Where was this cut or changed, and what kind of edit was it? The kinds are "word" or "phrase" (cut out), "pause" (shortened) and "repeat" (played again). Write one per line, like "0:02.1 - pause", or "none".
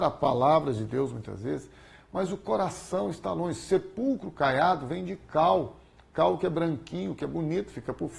none